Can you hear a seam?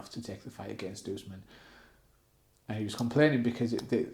no; 0 cuts

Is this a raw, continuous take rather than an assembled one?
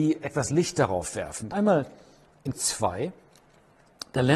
no; 2 cuts; at 1.5 s, 2.5 s

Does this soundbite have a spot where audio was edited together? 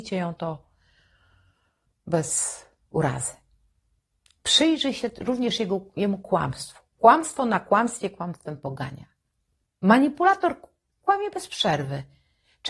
no; 0 cuts

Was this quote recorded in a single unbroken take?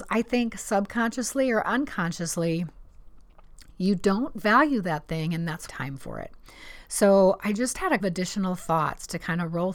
no; 2 cuts; at 5.7 s, 8.0 s

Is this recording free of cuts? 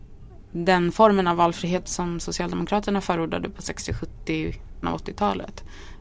no; 2 cuts; at 1.8 s, 4.8 s

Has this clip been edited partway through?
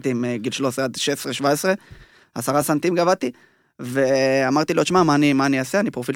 no; 0 cuts

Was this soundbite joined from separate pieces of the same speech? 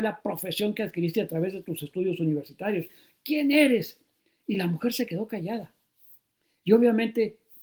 no; 0 cuts

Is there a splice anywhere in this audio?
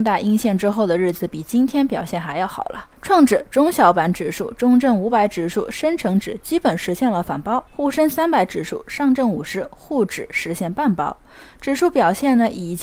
yes; 2 cuts; at 2.9 s, 7.7 s

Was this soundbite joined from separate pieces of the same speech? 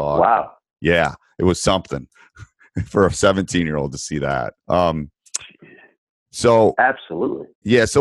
yes; 1 cut; at 4.6 s

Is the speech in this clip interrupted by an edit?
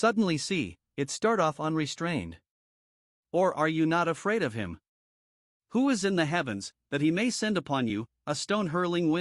no; 0 cuts

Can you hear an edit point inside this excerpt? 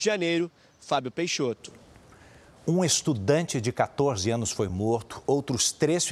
no; 0 cuts

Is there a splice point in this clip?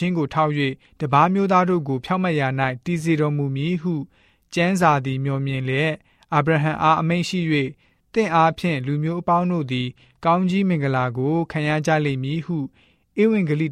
no; 0 cuts

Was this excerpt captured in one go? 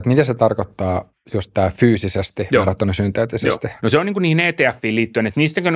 no; 2 cuts; at 1.2 s, 3.8 s

